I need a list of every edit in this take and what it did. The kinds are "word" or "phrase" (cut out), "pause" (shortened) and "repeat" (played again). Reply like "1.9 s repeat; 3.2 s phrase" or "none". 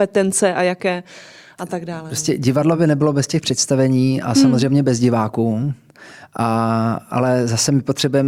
none